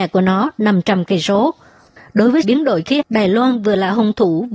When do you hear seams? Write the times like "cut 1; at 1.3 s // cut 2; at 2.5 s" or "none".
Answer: cut 1; at 2.4 s // cut 2; at 3.0 s